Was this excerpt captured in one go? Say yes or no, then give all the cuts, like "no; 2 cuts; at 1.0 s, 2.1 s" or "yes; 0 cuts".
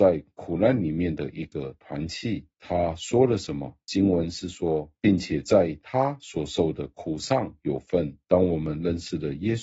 no; 3 cuts; at 2.5 s, 3.8 s, 8.2 s